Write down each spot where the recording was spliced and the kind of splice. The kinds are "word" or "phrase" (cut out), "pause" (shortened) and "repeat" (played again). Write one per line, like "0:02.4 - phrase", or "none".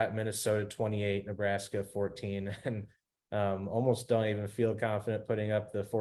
none